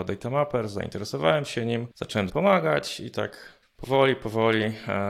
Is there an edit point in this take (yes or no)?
yes